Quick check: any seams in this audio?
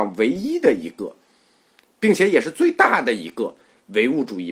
no; 0 cuts

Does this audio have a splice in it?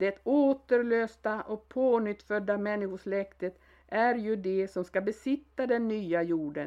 no; 0 cuts

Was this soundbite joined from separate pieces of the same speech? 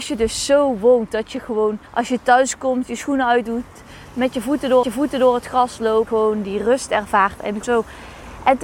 yes; 4 cuts; at 1.9 s, 4.8 s, 6.1 s, 7.6 s

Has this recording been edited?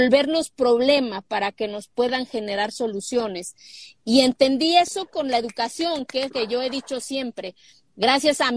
yes; 1 cut; at 6.3 s

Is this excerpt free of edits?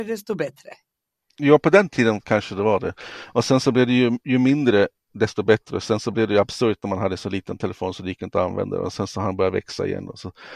yes; 0 cuts

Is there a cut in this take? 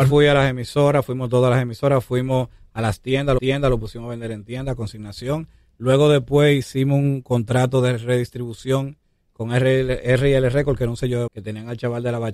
yes; 2 cuts; at 3.4 s, 11.3 s

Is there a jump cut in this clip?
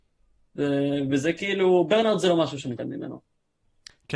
yes; 1 cut; at 2.8 s

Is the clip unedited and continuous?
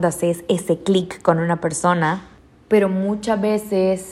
yes; 0 cuts

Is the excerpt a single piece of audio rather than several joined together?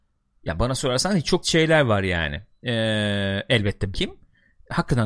no; 2 cuts; at 1.4 s, 3.9 s

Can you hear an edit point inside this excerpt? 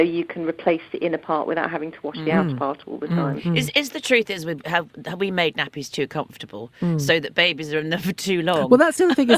no; 0 cuts

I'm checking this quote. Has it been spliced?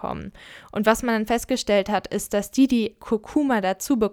no; 0 cuts

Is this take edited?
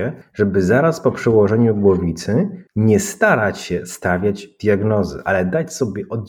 yes; 1 cut; at 2.7 s

